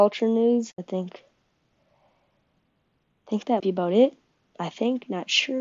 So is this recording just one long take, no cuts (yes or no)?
no